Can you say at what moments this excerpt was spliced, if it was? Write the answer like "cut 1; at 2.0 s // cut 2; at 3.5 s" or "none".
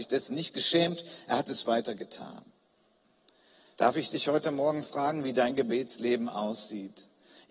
cut 1; at 1.6 s